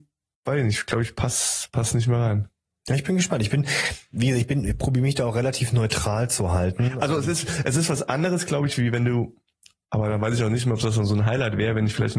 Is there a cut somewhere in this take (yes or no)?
no